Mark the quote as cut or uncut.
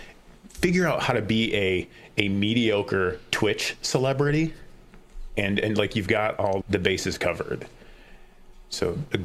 cut